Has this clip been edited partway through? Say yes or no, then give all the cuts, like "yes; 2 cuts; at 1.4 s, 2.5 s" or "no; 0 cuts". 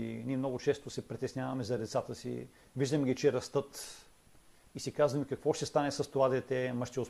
no; 0 cuts